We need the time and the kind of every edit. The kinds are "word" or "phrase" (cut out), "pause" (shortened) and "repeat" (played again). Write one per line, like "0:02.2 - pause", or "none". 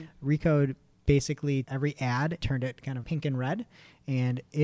0:01.6 - word
0:02.4 - word
0:03.0 - word